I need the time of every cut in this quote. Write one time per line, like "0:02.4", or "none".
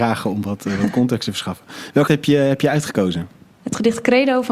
0:02.1